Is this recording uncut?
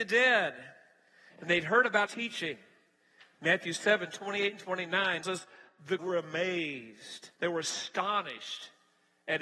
no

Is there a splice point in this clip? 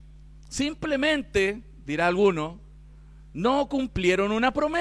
no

